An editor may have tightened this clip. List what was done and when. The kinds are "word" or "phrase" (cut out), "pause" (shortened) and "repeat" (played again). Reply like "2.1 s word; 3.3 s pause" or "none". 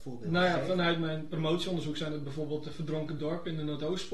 none